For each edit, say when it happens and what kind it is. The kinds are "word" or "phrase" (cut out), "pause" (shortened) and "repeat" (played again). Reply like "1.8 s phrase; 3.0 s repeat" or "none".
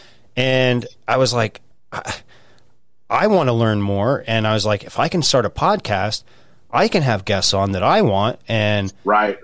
none